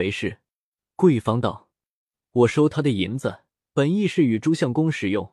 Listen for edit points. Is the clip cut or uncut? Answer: cut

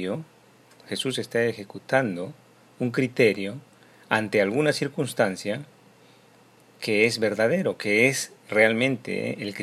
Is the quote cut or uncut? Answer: uncut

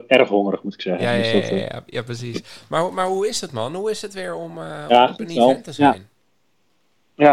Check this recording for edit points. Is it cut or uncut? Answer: uncut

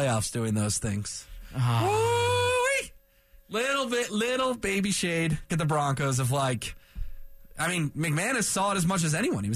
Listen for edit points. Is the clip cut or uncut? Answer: cut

